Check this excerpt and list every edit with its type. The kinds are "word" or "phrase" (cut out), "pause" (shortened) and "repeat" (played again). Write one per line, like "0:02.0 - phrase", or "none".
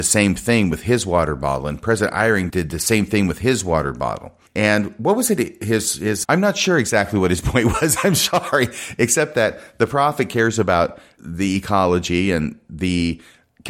0:02.5 - word
0:06.2 - word
0:11.2 - word